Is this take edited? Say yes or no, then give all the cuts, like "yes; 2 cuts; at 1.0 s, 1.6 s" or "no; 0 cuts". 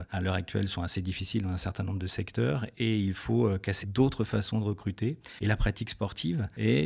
yes; 1 cut; at 3.8 s